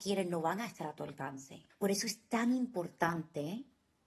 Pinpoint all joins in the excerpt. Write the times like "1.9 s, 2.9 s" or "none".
1.7 s

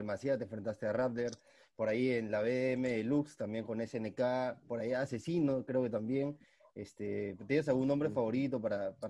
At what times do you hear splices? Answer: none

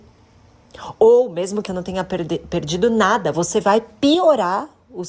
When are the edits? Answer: 1.7 s

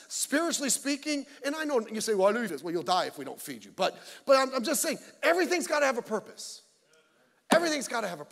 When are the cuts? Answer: 2.5 s

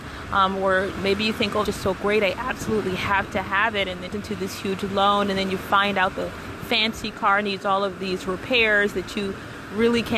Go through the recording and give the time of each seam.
1.0 s, 1.7 s, 4.1 s

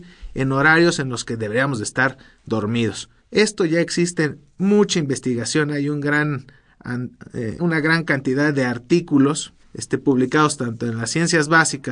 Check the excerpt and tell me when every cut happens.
3.2 s, 7.6 s, 9.6 s

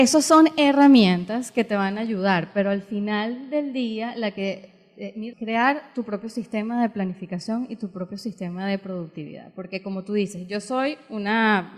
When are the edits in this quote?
5.3 s

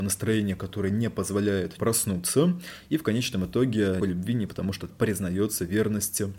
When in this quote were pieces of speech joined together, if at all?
1.8 s, 4.0 s, 4.5 s, 4.9 s

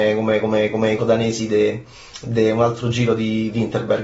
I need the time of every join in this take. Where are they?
1.0 s

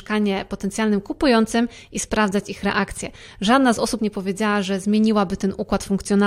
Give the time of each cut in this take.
4.0 s

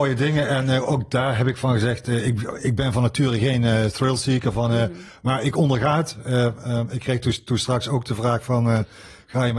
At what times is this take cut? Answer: none

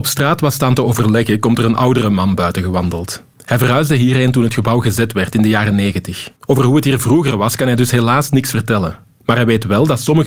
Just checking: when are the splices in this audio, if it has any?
3.3 s, 6.4 s

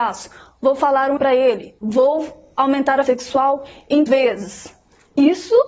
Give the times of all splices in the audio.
1.2 s, 1.8 s, 3.1 s, 4.1 s

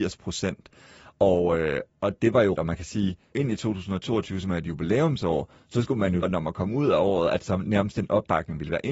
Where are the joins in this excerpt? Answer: 2.6 s, 3.3 s, 6.2 s

